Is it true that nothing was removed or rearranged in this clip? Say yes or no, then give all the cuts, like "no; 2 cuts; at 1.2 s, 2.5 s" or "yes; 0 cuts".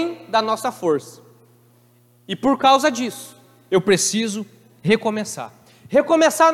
yes; 0 cuts